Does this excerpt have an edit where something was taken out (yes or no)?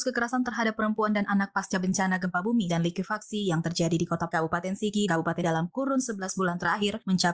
yes